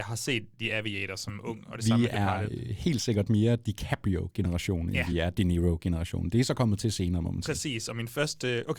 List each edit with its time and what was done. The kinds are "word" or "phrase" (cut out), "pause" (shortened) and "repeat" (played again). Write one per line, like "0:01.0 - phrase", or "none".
none